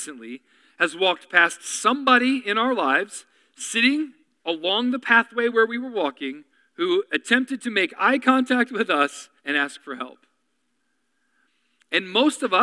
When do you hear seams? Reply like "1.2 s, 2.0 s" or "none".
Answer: 4.2 s, 6.5 s, 9.4 s